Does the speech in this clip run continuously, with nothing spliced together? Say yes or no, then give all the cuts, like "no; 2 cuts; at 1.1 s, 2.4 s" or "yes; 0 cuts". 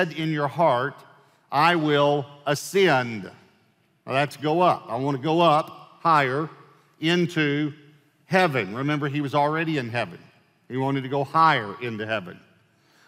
yes; 0 cuts